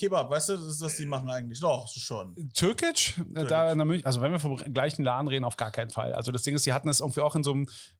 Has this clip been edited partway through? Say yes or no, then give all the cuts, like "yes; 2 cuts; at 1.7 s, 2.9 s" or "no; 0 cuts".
no; 0 cuts